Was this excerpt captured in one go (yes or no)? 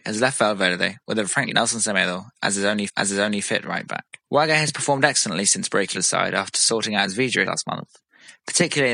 no